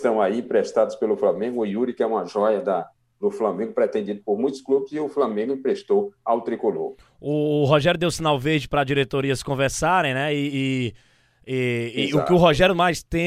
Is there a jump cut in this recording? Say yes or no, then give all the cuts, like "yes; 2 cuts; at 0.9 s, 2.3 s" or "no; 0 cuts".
no; 0 cuts